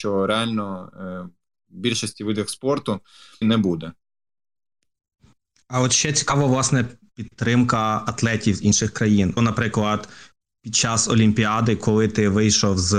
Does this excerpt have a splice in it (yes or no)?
yes